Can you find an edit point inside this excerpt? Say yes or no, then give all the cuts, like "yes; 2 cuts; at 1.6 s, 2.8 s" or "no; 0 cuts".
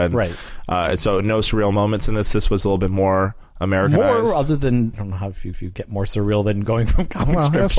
yes; 2 cuts; at 4.9 s, 5.5 s